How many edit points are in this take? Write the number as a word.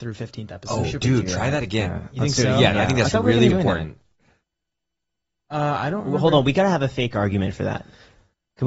two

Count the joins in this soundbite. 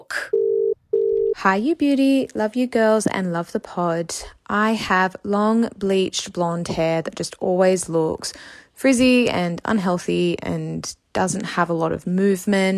zero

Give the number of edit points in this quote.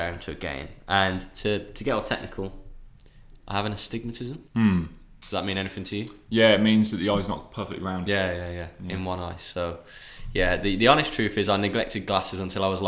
one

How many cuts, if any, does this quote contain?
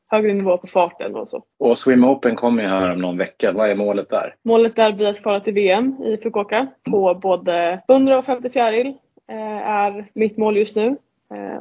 four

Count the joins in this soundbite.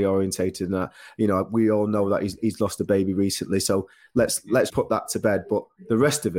one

